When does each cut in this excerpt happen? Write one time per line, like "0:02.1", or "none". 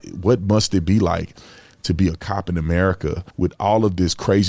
0:03.3